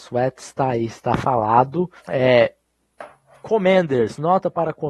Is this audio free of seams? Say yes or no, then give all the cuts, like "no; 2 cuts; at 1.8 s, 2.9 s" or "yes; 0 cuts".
no; 1 cut; at 2.0 s